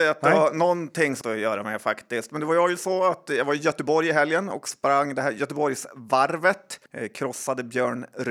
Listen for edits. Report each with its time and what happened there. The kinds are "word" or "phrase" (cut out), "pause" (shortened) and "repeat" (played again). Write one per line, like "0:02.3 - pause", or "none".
0:01.2 - word
0:06.9 - pause

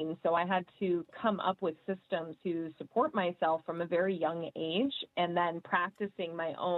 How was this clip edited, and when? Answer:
0:02.4 - pause

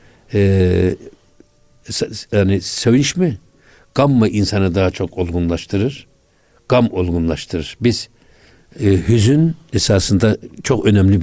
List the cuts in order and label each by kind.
none

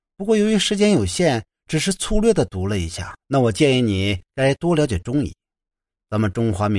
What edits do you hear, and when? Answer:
0:03.2 - pause

